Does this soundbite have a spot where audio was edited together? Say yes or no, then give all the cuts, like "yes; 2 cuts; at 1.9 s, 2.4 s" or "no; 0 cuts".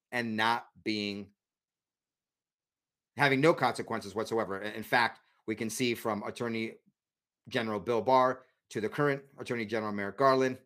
no; 0 cuts